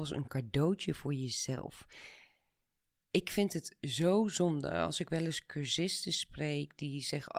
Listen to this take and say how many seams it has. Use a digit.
0